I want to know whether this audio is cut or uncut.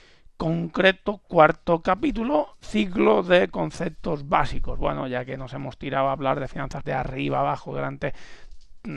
cut